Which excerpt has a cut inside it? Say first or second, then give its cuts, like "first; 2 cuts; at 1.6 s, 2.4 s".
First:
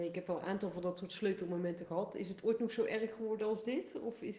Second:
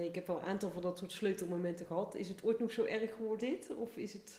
second; 1 cut; at 3.4 s